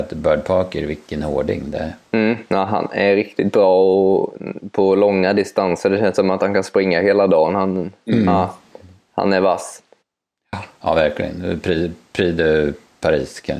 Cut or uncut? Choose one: uncut